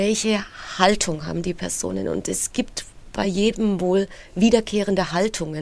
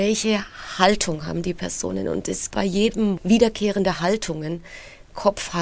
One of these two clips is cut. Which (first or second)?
second